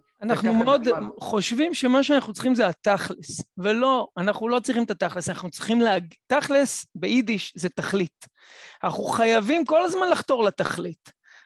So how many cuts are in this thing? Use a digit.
0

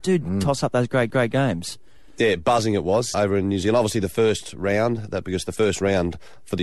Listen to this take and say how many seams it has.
2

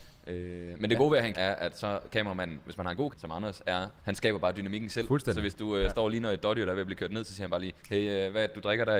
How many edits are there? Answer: 4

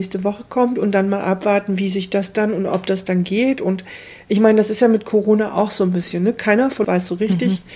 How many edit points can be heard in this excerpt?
1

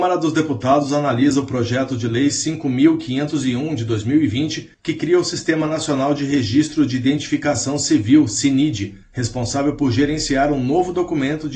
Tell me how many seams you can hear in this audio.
2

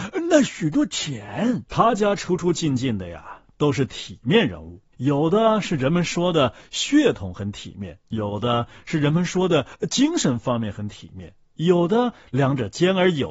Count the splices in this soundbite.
4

